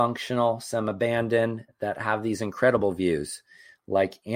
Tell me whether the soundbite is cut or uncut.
uncut